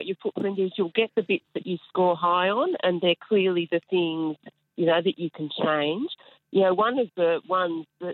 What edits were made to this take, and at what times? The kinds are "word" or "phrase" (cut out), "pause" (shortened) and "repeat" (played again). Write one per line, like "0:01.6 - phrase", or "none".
none